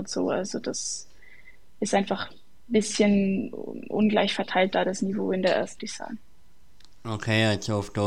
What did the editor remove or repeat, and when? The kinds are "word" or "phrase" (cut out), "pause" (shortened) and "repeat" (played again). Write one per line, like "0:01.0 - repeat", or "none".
0:05.8 - phrase

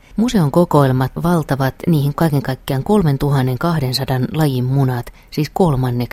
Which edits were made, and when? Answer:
0:01.2 - word
0:02.1 - word

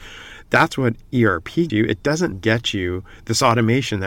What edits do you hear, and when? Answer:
0:01.7 - word
0:02.3 - word

